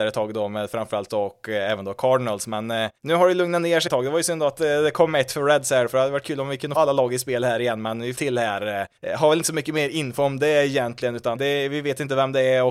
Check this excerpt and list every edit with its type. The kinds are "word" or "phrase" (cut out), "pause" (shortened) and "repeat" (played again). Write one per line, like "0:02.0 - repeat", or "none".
0:01.1 - word
0:03.0 - pause
0:03.9 - word
0:06.8 - word
0:08.2 - phrase
0:09.0 - pause
0:11.4 - word